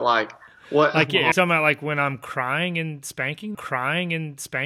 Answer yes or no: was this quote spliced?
yes